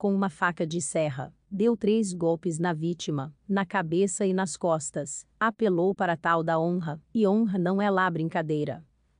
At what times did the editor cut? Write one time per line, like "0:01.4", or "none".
0:01.4
0:03.4
0:07.0